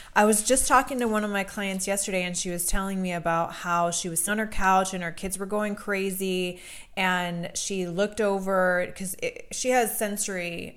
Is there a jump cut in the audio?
yes; 1 cut; at 4.3 s

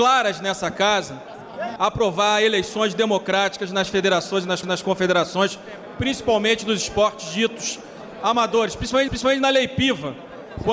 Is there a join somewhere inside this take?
yes; 3 cuts; at 1.8 s, 4.6 s, 9.1 s

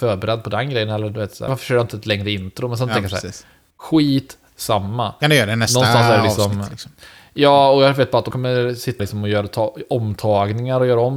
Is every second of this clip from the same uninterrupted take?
no; 3 cuts; at 1.5 s, 8.3 s, 9.0 s

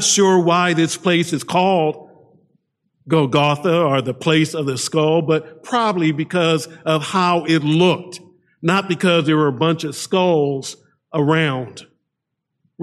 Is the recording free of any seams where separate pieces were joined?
yes; 0 cuts

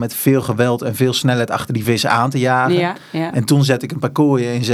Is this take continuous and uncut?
yes; 0 cuts

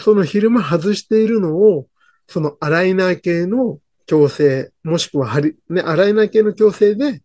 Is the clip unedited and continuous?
yes; 0 cuts

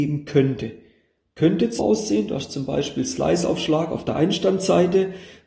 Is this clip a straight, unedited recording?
no; 1 cut; at 1.8 s

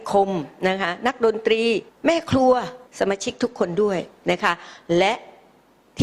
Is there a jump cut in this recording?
yes; 2 cuts; at 1.9 s, 2.9 s

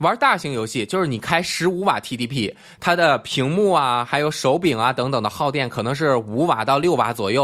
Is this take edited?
no; 0 cuts

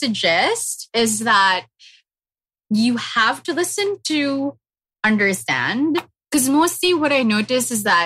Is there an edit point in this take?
no; 0 cuts

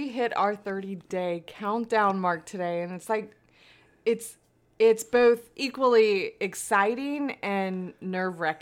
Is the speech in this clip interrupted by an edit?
no; 0 cuts

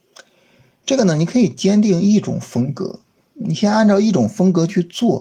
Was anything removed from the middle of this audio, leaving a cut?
no; 0 cuts

